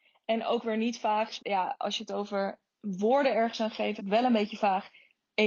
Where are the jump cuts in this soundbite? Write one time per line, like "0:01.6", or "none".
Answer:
0:01.4
0:02.7
0:04.0